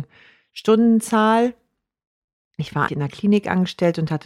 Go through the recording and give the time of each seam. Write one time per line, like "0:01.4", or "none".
0:02.9